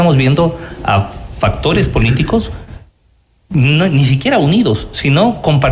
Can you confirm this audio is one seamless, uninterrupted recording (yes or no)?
yes